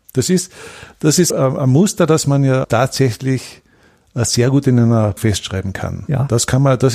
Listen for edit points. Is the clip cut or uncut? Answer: cut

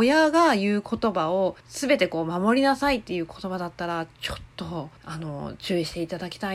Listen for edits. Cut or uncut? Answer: cut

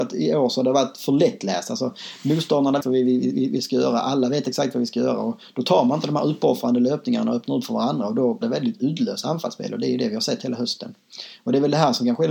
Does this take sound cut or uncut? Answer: cut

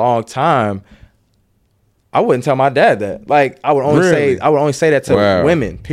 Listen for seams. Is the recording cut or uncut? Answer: uncut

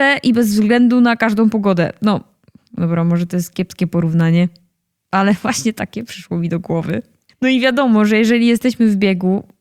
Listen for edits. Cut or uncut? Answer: uncut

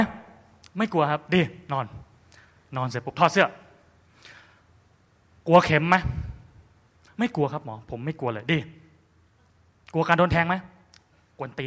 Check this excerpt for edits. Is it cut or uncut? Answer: uncut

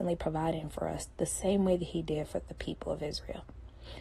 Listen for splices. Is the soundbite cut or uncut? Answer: uncut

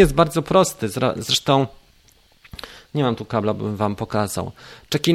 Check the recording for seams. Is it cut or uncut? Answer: uncut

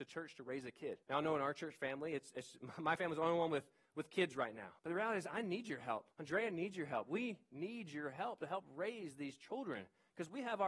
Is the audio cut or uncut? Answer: cut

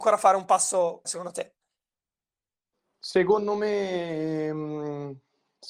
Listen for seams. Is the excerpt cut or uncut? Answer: cut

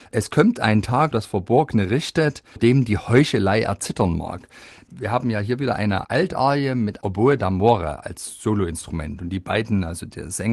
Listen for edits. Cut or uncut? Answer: cut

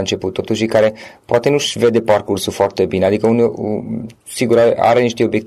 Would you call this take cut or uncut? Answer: uncut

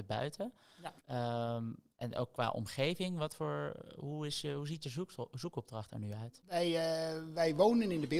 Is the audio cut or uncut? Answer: cut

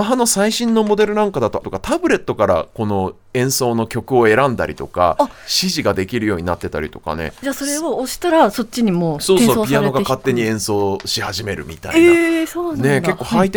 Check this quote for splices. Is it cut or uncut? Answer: cut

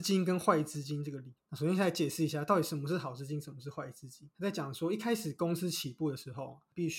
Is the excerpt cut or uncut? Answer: cut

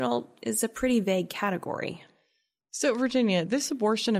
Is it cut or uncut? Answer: uncut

